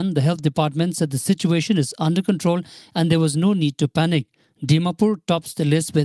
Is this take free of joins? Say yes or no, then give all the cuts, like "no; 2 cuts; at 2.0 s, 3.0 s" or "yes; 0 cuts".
yes; 0 cuts